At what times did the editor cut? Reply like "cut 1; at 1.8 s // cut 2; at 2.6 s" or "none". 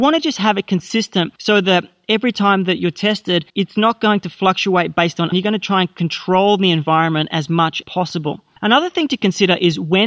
cut 1; at 1.4 s // cut 2; at 3.5 s // cut 3; at 5.3 s // cut 4; at 7.8 s